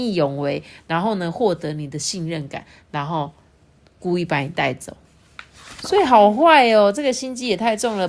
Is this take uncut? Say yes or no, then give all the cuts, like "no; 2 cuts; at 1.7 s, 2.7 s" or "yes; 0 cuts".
yes; 0 cuts